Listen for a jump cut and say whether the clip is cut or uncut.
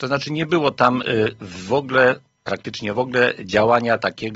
uncut